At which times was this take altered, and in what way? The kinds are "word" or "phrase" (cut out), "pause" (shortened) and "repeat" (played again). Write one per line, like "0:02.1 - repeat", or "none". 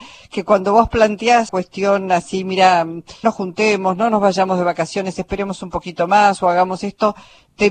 0:01.5 - word
0:03.2 - word